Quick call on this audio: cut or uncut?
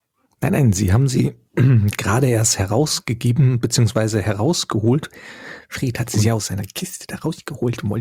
uncut